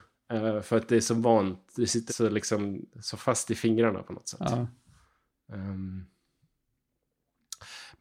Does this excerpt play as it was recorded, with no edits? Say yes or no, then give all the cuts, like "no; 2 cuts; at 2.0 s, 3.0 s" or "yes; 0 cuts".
no; 1 cut; at 2.1 s